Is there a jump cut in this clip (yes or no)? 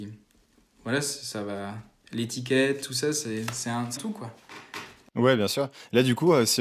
yes